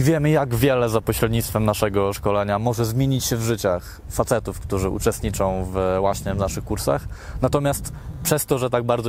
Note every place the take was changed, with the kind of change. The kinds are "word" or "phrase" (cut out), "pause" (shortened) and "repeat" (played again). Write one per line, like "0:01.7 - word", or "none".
none